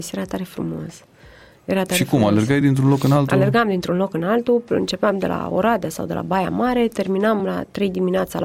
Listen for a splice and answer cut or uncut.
uncut